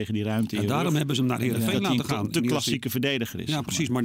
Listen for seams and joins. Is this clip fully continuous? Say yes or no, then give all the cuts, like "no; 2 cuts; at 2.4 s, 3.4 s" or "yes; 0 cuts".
yes; 0 cuts